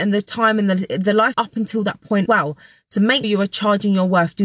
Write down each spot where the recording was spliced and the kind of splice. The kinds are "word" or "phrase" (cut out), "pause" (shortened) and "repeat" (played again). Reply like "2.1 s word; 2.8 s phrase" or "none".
1.3 s word; 2.3 s word; 3.2 s word